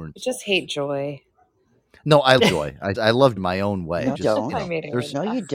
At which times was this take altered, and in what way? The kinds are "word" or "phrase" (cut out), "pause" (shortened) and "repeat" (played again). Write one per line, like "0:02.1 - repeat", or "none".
0:02.4 - word
0:02.9 - word
0:03.4 - word
0:04.1 - word